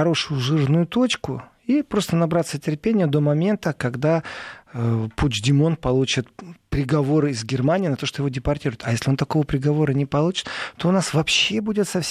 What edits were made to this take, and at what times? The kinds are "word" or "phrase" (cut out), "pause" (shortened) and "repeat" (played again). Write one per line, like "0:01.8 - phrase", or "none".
none